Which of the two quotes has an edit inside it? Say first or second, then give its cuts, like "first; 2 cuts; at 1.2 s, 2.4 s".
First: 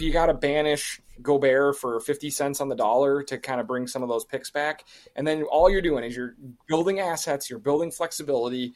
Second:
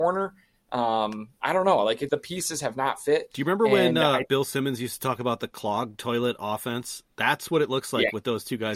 second; 2 cuts; at 2.1 s, 4.3 s